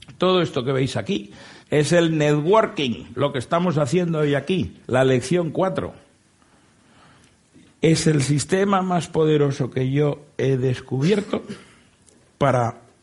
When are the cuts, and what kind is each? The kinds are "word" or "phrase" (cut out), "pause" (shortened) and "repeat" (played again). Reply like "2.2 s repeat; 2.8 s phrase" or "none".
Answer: 1.6 s pause; 4.8 s pause